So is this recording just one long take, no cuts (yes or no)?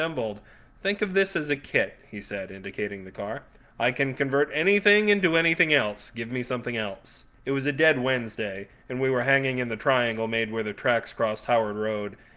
yes